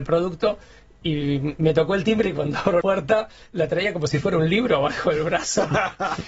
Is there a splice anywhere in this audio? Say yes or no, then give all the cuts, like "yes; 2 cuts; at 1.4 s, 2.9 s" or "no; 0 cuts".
yes; 1 cut; at 2.8 s